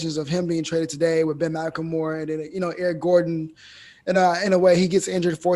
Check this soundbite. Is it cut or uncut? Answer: uncut